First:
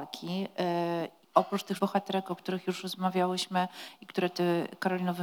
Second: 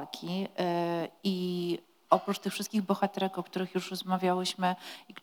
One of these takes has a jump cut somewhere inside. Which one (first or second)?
first